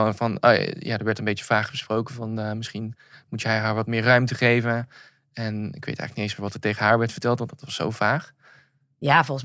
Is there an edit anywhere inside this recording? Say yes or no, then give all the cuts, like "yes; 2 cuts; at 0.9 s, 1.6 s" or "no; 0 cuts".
no; 0 cuts